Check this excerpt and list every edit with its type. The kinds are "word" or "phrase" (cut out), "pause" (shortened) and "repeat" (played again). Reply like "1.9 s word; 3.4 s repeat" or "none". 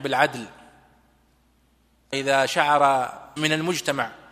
2.1 s word; 3.4 s word